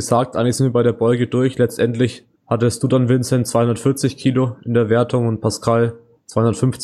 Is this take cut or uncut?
cut